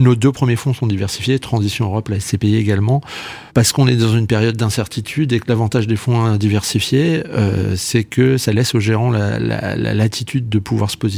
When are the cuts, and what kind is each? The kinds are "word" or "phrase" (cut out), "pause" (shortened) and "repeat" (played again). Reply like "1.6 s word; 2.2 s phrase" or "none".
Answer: 3.5 s pause

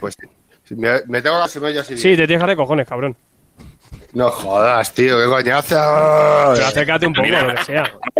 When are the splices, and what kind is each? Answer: 1.5 s word; 2.5 s word

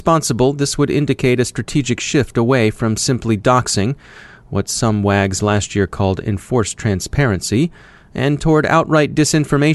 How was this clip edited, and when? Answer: none

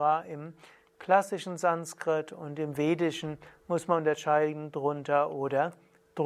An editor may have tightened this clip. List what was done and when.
none

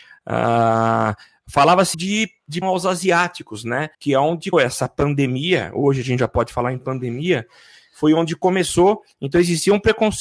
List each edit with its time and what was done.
1.9 s word; 2.6 s phrase; 3.9 s pause; 4.5 s word

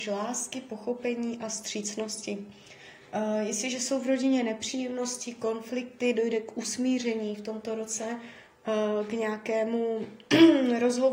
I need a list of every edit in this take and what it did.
none

